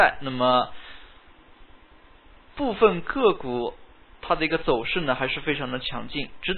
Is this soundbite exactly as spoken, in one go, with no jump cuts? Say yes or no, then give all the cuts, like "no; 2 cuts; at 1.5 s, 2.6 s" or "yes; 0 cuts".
yes; 0 cuts